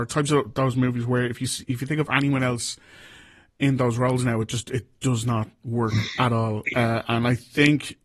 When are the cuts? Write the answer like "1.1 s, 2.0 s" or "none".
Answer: none